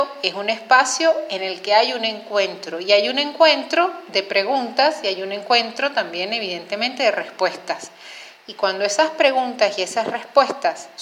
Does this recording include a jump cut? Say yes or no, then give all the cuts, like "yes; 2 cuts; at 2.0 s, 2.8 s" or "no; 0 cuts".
no; 0 cuts